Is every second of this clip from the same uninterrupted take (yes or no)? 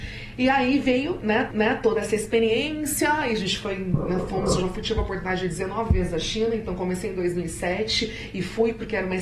no